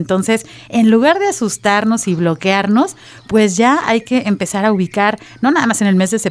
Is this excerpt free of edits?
yes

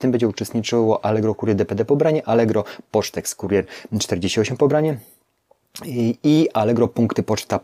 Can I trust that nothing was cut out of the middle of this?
yes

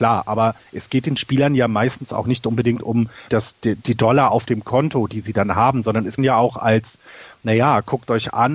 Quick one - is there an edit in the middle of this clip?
yes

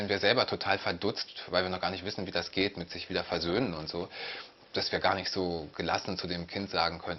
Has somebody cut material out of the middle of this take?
no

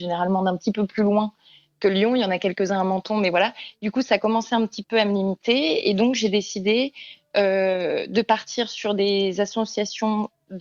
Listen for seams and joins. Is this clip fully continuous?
yes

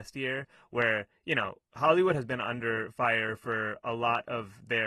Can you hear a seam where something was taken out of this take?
no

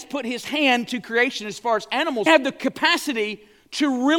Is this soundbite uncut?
no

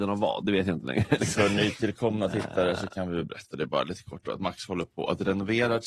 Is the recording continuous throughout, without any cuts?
yes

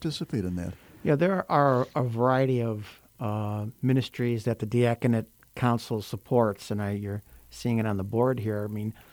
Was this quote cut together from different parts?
no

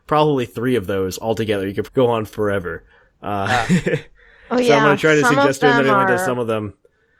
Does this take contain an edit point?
yes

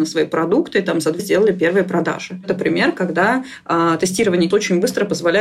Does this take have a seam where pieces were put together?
yes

